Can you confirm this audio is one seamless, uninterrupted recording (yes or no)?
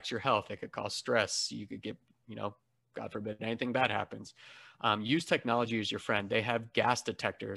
yes